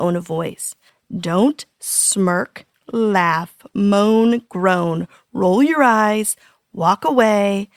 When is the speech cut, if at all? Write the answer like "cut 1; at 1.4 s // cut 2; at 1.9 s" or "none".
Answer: none

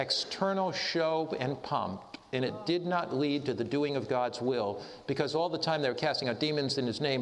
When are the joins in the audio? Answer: none

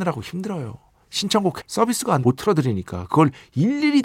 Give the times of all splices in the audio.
cut 1; at 1.6 s // cut 2; at 2.2 s

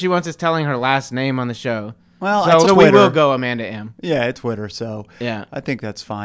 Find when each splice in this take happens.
cut 1; at 2.6 s // cut 2; at 4.3 s

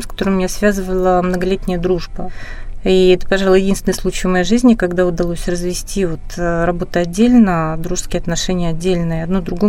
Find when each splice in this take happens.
none

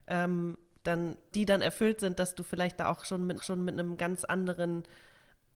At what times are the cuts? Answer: cut 1; at 1.3 s // cut 2; at 3.4 s

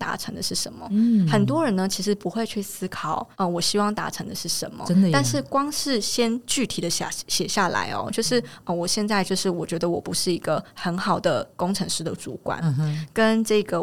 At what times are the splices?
cut 1; at 3.3 s

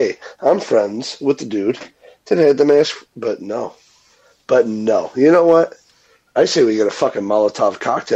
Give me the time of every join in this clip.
none

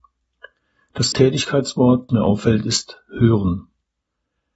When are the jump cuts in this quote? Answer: cut 1; at 1.1 s // cut 2; at 2.1 s

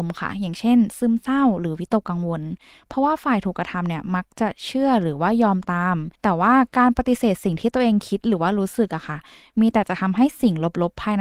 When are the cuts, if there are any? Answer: cut 1; at 6.2 s

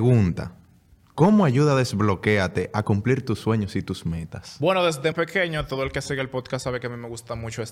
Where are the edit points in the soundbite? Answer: cut 1; at 5.1 s

